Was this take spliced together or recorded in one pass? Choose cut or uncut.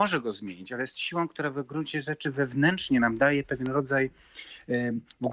uncut